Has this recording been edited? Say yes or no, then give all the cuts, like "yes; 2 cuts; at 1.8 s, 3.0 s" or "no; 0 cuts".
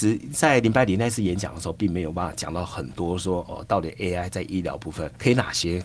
no; 0 cuts